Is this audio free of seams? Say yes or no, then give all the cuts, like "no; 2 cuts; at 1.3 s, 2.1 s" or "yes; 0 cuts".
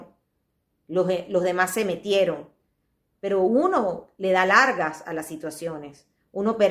yes; 0 cuts